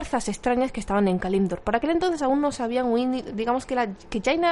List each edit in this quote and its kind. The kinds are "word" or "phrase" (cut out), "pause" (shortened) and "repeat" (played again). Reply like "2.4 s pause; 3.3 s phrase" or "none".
none